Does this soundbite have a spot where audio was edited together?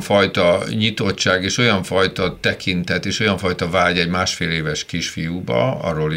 no; 0 cuts

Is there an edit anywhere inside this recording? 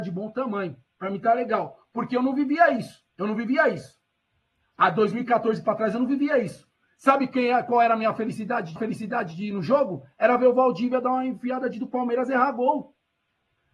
yes; 3 cuts; at 3.1 s, 8.8 s, 11.7 s

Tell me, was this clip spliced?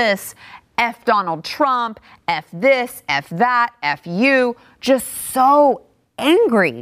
no; 0 cuts

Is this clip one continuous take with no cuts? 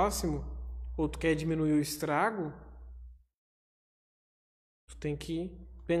yes; 0 cuts

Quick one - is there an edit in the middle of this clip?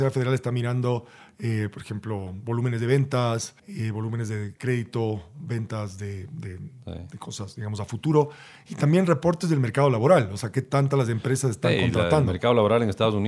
yes; 1 cut; at 3.6 s

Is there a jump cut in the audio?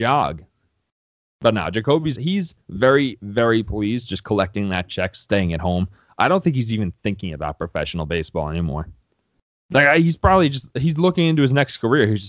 yes; 2 cuts; at 2.2 s, 2.6 s

